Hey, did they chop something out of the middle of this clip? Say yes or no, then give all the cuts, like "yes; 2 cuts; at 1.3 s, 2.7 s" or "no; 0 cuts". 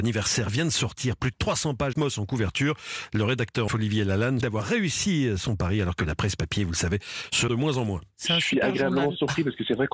yes; 4 cuts; at 1.9 s, 3.7 s, 4.4 s, 7.5 s